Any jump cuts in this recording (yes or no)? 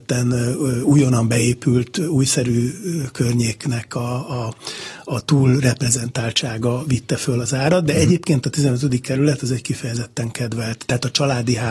no